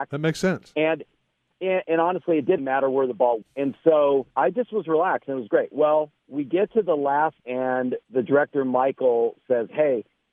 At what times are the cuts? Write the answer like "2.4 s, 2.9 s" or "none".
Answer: 1.8 s, 2.6 s, 3.4 s, 4.3 s, 6.2 s, 7.4 s, 8.0 s